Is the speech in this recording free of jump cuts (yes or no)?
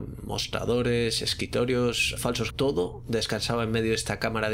no